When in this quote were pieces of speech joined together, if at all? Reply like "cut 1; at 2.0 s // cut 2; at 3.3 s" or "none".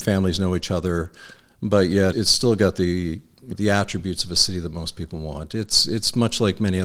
cut 1; at 2.1 s // cut 2; at 3.5 s